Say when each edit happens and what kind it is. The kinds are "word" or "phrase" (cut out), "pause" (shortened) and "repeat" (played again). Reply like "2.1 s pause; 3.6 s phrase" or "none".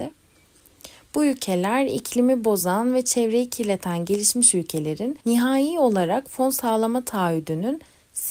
5.2 s pause